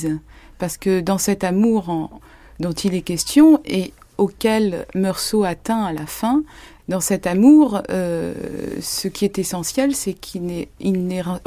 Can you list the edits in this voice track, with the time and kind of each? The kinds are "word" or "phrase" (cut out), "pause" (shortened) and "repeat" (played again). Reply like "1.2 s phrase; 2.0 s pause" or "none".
none